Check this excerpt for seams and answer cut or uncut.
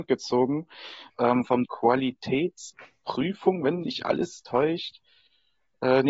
cut